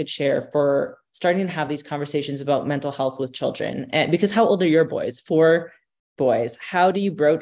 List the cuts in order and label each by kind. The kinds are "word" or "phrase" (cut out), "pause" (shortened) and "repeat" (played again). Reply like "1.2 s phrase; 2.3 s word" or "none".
none